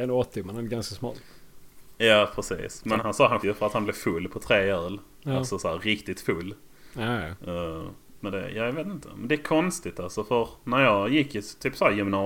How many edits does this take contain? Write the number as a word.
two